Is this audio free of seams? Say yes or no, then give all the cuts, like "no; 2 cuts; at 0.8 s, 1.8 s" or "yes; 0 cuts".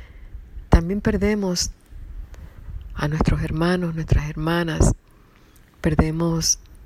yes; 0 cuts